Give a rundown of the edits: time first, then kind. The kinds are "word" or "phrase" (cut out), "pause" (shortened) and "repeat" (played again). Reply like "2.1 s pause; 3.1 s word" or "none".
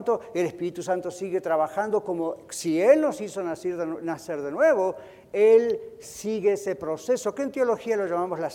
none